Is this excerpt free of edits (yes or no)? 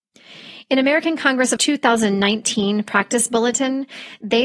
no